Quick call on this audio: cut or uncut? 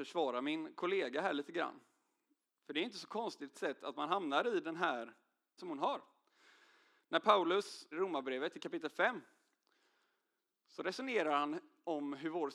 cut